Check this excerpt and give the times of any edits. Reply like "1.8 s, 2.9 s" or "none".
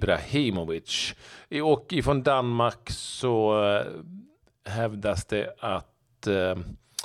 none